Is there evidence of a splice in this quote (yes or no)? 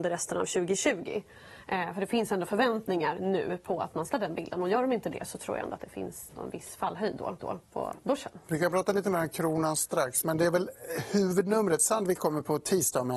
yes